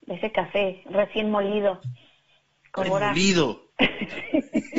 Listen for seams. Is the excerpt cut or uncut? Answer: cut